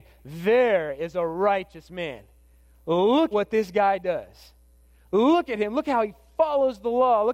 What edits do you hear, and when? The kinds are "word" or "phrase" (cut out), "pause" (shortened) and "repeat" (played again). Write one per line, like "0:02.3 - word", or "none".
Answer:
0:03.3 - word